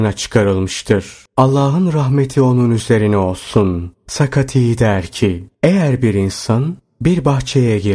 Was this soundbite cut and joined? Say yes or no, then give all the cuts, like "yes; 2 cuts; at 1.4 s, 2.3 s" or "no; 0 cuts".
yes; 2 cuts; at 1.3 s, 5.5 s